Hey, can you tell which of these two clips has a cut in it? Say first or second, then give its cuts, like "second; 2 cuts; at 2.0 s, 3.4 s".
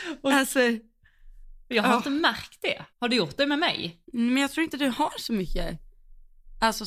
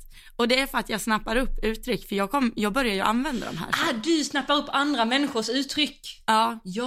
first; 3 cuts; at 1.6 s, 2.9 s, 4.0 s